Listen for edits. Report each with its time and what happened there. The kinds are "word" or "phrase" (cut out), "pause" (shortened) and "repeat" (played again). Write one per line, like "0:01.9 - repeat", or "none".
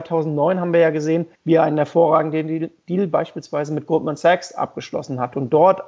0:01.3 - pause